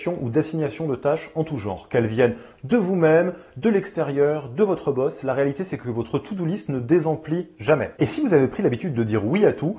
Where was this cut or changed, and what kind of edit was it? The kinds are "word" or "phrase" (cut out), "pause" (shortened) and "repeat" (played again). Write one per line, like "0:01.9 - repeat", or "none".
none